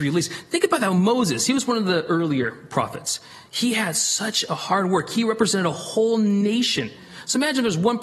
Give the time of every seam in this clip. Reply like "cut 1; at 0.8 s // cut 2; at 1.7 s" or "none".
none

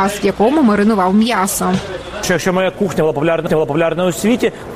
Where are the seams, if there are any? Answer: cut 1; at 3.5 s

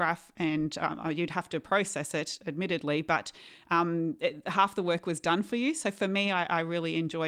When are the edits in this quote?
none

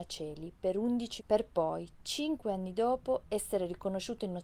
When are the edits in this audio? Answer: cut 1; at 1.2 s

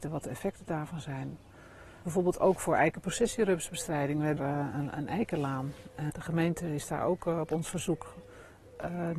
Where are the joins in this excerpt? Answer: cut 1; at 2.0 s // cut 2; at 4.4 s // cut 3; at 6.1 s

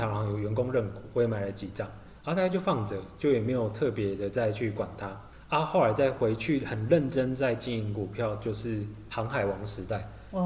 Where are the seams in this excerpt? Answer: cut 1; at 2.2 s

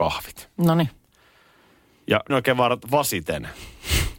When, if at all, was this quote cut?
cut 1; at 2.3 s

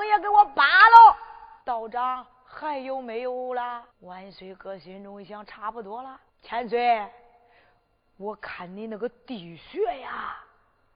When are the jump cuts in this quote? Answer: cut 1; at 1.6 s // cut 2; at 3.9 s // cut 3; at 6.3 s

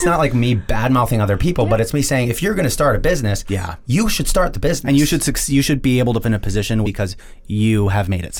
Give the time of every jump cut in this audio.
cut 1; at 6.2 s // cut 2; at 6.8 s

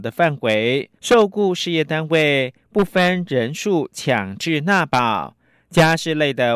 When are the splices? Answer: cut 1; at 1.0 s

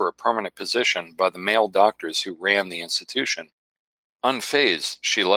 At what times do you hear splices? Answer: none

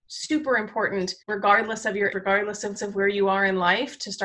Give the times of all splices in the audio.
cut 1; at 1.2 s // cut 2; at 2.1 s // cut 3; at 2.8 s

